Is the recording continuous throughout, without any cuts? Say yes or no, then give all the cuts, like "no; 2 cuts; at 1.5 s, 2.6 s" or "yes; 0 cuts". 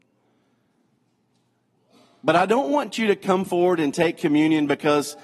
yes; 0 cuts